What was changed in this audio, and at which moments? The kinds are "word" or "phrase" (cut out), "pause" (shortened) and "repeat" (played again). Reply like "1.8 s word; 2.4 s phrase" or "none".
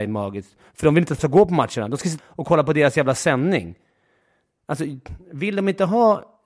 1.2 s word; 2.2 s word